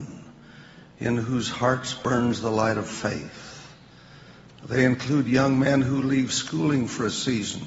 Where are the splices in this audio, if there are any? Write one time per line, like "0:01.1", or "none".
none